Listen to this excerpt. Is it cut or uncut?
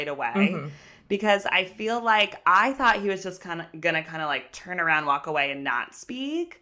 uncut